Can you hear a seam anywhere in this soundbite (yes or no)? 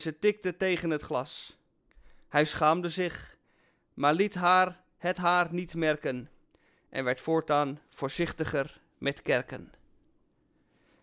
no